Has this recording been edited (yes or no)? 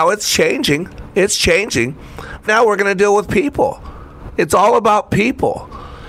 yes